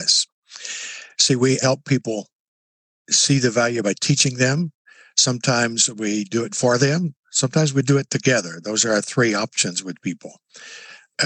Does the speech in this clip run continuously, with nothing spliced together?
no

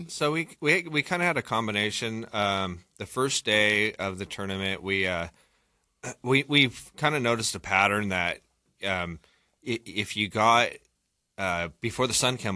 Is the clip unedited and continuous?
no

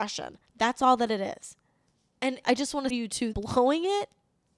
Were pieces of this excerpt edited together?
yes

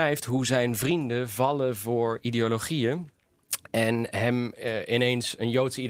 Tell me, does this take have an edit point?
no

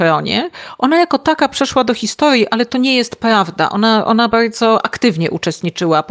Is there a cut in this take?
no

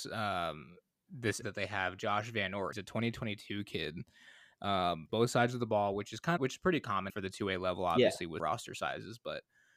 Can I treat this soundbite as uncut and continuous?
no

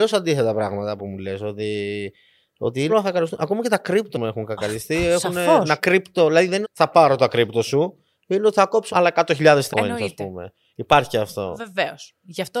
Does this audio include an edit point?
yes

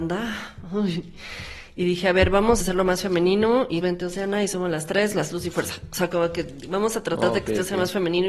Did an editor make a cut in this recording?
yes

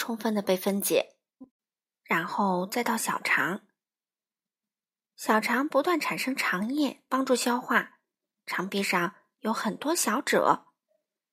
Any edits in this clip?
no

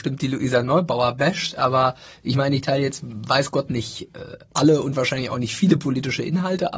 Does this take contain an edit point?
no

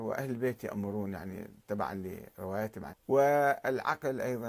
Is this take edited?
yes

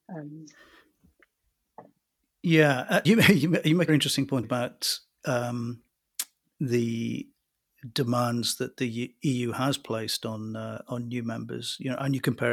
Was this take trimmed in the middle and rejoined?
yes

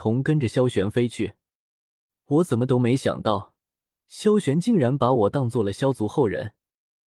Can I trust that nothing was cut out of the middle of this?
yes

